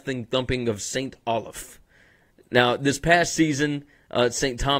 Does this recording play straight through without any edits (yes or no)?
yes